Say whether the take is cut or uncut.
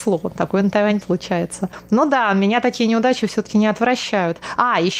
cut